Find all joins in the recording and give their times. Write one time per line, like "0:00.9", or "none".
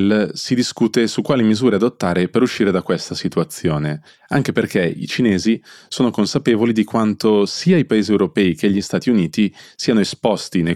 none